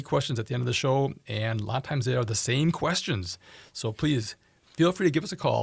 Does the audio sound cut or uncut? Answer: uncut